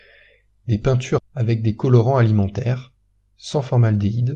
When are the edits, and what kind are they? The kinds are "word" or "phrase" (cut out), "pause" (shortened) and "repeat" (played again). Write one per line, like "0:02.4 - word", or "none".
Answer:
0:01.2 - phrase